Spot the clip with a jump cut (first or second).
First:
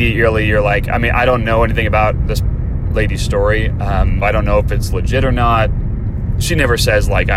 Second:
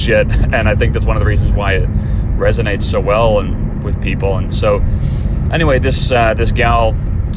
first